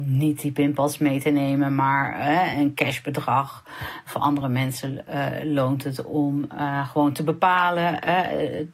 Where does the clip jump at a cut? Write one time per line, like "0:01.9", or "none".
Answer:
none